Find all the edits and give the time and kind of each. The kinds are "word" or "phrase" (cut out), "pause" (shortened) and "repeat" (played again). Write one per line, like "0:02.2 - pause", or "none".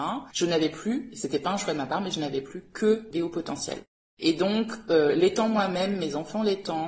none